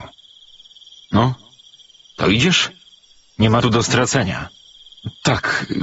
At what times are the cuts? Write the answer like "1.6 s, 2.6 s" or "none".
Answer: 1.0 s, 3.6 s